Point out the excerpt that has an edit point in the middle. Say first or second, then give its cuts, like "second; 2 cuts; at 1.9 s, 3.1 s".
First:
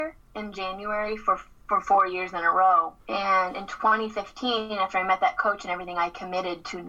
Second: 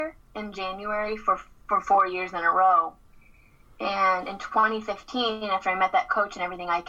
first; 1 cut; at 3.0 s